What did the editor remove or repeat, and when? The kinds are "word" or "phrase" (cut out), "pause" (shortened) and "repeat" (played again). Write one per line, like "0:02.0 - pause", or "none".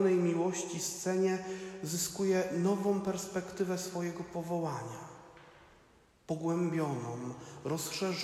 none